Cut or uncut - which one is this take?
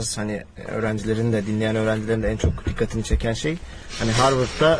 uncut